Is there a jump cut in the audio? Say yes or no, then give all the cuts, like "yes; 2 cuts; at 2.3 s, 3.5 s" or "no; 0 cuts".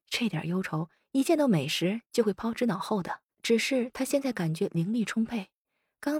yes; 1 cut; at 3.3 s